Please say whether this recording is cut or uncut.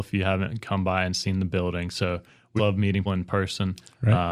cut